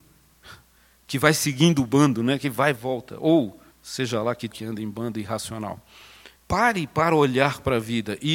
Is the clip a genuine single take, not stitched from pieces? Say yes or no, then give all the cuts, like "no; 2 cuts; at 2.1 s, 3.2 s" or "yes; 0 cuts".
no; 4 cuts; at 2.7 s, 3.7 s, 4.5 s, 6.4 s